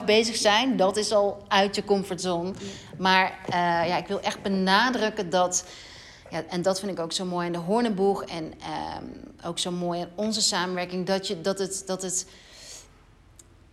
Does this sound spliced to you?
no; 0 cuts

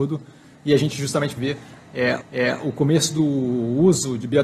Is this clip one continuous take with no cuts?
no; 2 cuts; at 1.4 s, 2.2 s

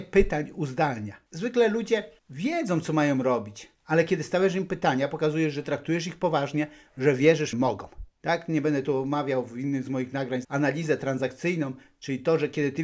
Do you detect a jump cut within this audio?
yes; 6 cuts; at 1.3 s, 2.2 s, 3.7 s, 7.5 s, 8.1 s, 10.4 s

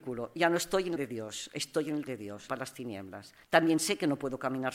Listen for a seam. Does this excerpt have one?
yes; 4 cuts; at 1.0 s, 2.1 s, 2.5 s, 3.4 s

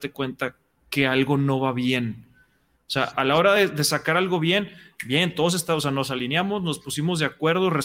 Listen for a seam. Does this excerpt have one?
no; 0 cuts

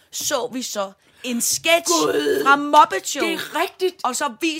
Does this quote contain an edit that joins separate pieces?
no; 0 cuts

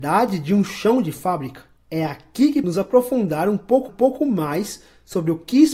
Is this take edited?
yes; 3 cuts; at 1.8 s, 2.6 s, 3.9 s

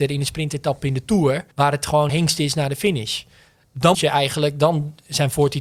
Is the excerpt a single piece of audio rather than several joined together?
no; 3 cuts; at 1.5 s, 2.1 s, 3.9 s

